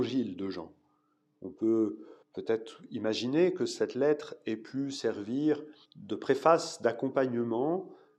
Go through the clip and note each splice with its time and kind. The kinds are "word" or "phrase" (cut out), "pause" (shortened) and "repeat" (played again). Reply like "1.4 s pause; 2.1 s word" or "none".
2.2 s pause; 5.8 s pause